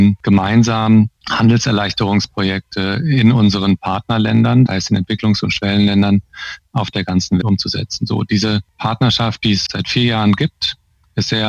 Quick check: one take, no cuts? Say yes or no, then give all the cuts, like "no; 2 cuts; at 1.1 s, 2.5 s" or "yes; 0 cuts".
no; 4 cuts; at 1.2 s, 4.7 s, 7.4 s, 9.7 s